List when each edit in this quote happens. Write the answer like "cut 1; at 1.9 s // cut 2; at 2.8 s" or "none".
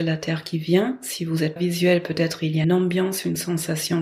cut 1; at 1.6 s // cut 2; at 2.6 s